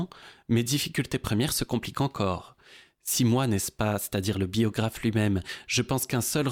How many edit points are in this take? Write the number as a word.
zero